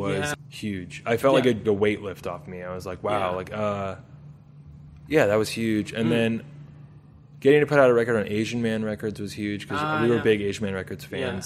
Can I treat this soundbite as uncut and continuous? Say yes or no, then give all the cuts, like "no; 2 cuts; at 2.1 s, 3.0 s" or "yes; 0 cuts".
no; 1 cut; at 1.6 s